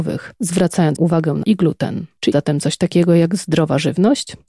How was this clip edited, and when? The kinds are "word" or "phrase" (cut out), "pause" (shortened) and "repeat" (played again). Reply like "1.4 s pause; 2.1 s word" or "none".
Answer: 1.0 s word; 1.4 s word; 2.3 s word